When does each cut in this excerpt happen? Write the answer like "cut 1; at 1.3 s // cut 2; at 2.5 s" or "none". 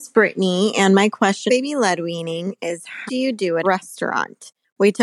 cut 1; at 1.5 s // cut 2; at 3.1 s // cut 3; at 3.6 s